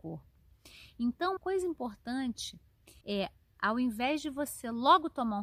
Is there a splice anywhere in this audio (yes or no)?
yes